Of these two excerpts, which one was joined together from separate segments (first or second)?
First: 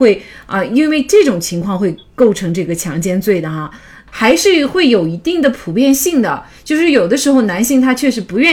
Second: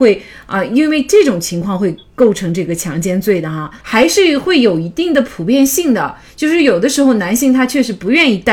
second